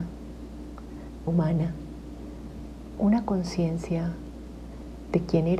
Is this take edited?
yes; 2 cuts; at 1.3 s, 3.0 s

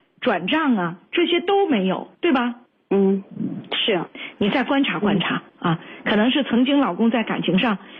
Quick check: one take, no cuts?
no; 3 cuts; at 2.1 s, 2.7 s, 5.5 s

